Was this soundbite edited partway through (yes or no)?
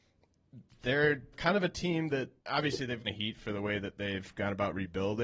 yes